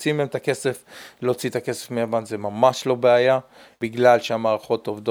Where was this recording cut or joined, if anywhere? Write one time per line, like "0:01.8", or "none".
none